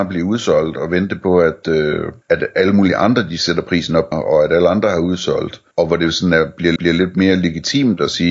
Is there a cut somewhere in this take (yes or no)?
yes